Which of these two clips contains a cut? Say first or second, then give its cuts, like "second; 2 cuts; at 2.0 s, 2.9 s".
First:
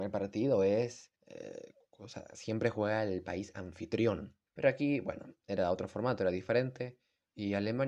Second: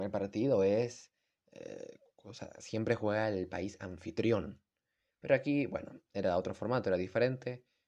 first; 2 cuts; at 1.2 s, 4.5 s